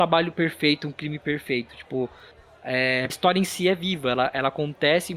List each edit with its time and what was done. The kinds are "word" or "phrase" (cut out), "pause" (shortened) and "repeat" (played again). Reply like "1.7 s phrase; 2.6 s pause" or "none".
3.1 s phrase